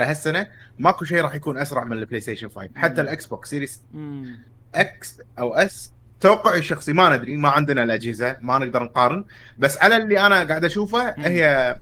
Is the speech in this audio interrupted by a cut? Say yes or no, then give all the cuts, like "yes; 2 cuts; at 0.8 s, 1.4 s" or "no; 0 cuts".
no; 0 cuts